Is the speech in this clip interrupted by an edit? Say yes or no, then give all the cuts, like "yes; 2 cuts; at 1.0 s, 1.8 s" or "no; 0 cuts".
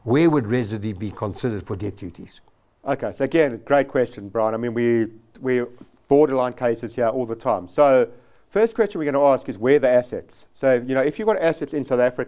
no; 0 cuts